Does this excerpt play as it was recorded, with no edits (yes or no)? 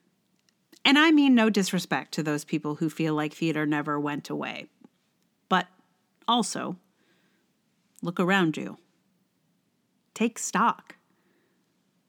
yes